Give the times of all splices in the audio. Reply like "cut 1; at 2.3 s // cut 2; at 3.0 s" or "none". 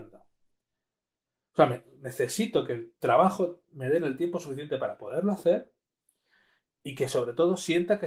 cut 1; at 3.0 s